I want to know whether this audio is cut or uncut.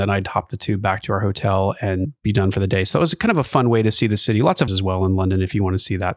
cut